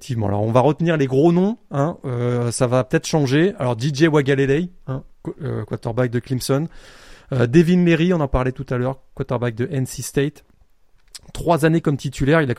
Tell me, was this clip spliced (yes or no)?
yes